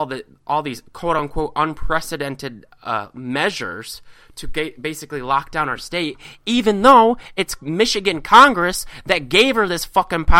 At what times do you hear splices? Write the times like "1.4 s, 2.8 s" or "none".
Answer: none